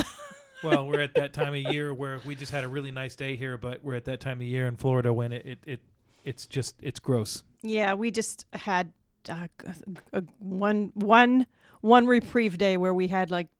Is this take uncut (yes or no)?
yes